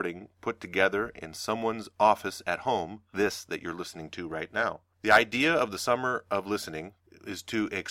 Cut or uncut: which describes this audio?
cut